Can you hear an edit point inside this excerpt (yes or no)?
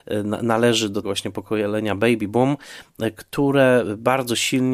yes